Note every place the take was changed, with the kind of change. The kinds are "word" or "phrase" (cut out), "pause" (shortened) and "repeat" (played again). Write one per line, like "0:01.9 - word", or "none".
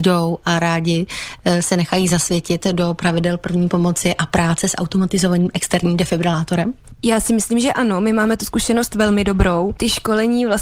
none

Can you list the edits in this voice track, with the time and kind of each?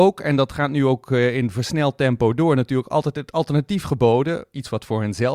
none

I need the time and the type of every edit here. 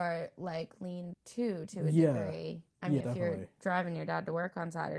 0:01.1 - word
0:02.7 - pause
0:03.0 - phrase

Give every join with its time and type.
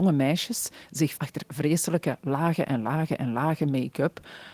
0:01.2 - word

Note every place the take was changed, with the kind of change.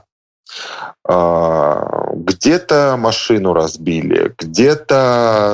none

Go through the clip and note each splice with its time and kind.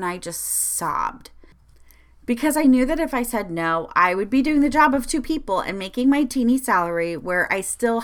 none

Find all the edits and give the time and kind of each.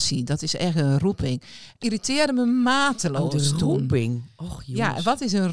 0:01.8 - word

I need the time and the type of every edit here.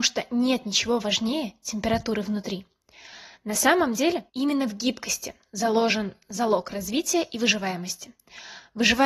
0:04.3 - pause

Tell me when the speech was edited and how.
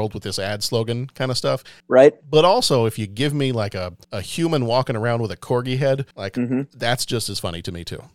0:01.8 - pause
0:04.0 - pause
0:06.1 - pause

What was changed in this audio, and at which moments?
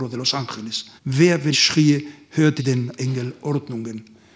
0:01.0 - pause
0:01.5 - word
0:02.6 - word
0:03.0 - phrase

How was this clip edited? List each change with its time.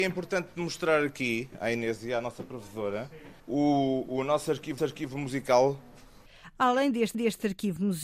0:03.4 - pause
0:04.8 - repeat
0:07.1 - repeat

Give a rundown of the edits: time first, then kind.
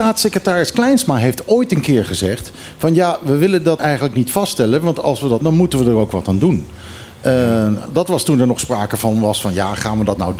0:03.8 - word
0:05.4 - word
0:07.9 - word

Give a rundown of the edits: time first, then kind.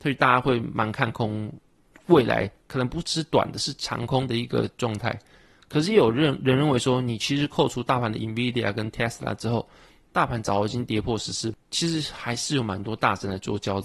none

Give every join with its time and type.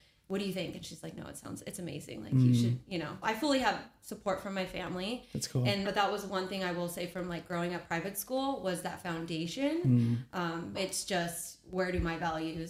0:03.2 - word
0:05.8 - word
0:10.7 - word

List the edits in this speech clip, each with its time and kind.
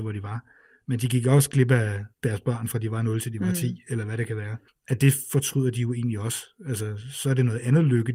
0:02.1 - pause
0:04.7 - pause

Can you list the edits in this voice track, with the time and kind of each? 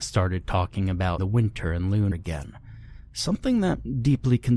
0:01.2 - word
0:02.1 - word

